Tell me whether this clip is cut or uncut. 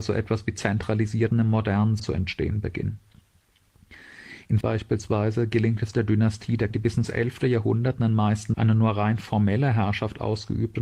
cut